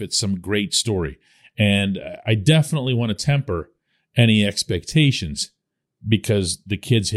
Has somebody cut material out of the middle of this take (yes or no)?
no